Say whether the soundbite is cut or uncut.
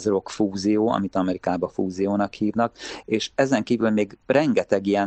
uncut